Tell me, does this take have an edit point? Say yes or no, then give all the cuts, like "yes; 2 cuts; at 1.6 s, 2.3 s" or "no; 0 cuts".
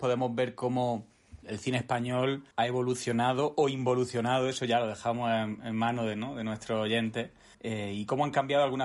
yes; 3 cuts; at 1.4 s, 2.5 s, 7.5 s